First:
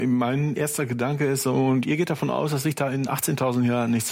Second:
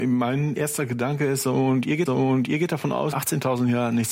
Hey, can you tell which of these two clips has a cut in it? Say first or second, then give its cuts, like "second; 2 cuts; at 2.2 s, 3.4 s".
second; 2 cuts; at 2.1 s, 3.1 s